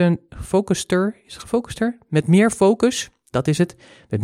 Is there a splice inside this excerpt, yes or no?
no